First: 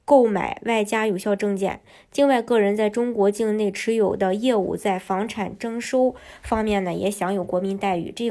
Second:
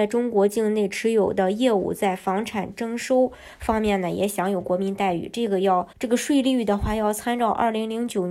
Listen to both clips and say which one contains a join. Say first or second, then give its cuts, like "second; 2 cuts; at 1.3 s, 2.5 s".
second; 1 cut; at 5.9 s